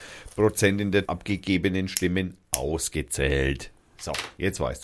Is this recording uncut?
no; 1 cut; at 1.1 s

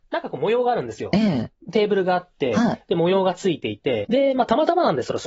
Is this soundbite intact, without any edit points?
no; 1 cut; at 4.0 s

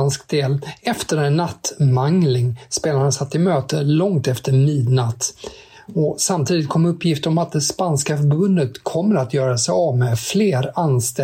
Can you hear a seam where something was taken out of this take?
no; 0 cuts

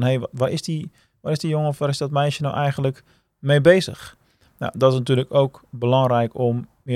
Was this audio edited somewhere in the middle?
no; 0 cuts

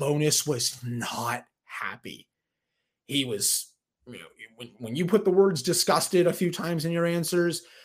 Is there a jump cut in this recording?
no; 0 cuts

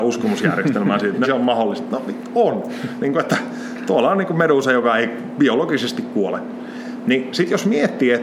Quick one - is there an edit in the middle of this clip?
yes; 1 cut; at 1.2 s

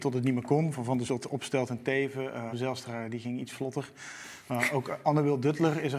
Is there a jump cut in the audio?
yes; 2 cuts; at 1.1 s, 2.5 s

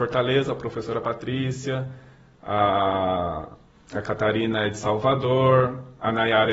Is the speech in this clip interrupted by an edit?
yes; 1 cut; at 3.7 s

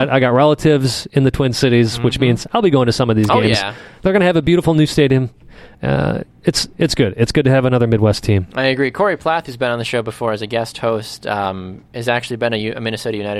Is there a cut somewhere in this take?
no; 0 cuts

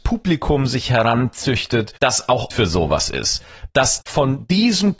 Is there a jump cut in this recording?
yes; 3 cuts; at 2.0 s, 2.5 s, 4.0 s

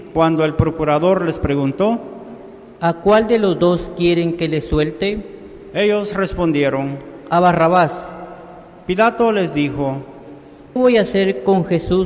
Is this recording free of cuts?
no; 1 cut; at 10.8 s

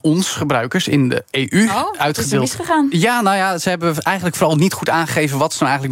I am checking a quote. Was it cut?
no; 0 cuts

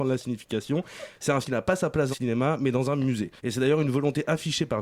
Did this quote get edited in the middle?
yes; 3 cuts; at 1.4 s, 2.1 s, 3.4 s

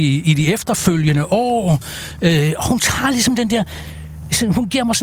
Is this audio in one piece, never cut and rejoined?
yes; 0 cuts

